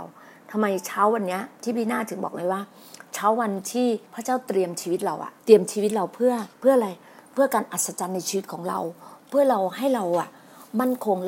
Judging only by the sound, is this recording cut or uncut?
cut